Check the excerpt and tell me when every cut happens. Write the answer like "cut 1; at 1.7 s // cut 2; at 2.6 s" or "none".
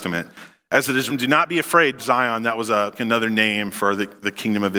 cut 1; at 1.1 s // cut 2; at 2.0 s // cut 3; at 2.9 s